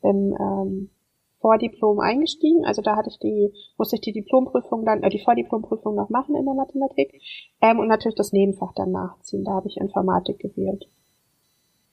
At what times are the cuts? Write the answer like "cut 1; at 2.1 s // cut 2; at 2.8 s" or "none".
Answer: none